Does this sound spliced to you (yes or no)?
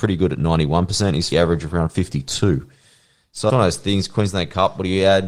yes